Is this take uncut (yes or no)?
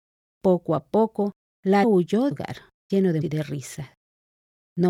no